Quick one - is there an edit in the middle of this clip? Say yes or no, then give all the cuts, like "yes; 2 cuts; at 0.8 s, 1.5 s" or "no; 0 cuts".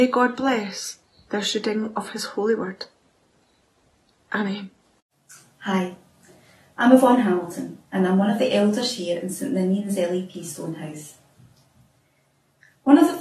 no; 0 cuts